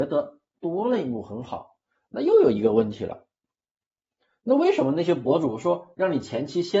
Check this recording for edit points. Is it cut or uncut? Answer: uncut